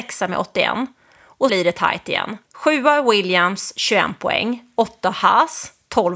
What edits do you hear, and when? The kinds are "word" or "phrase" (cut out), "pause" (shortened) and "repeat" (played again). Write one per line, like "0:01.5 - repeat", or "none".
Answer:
0:01.5 - word
0:02.4 - pause